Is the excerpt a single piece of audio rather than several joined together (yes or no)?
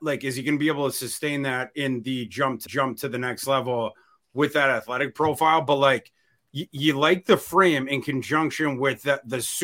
no